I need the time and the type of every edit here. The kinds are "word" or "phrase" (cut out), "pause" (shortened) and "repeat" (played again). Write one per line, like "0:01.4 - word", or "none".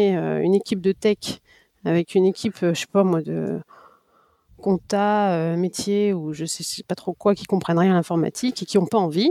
none